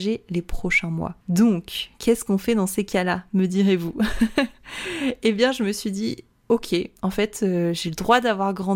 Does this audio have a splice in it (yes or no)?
yes